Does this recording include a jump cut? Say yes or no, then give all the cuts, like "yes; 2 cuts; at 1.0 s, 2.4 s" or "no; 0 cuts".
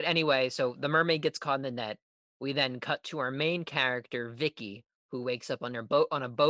no; 0 cuts